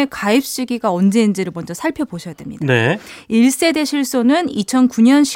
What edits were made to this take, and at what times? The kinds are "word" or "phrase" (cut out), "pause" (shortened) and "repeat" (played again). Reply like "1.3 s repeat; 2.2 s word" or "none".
none